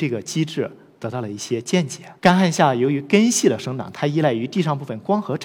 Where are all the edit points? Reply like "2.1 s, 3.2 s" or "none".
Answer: 2.2 s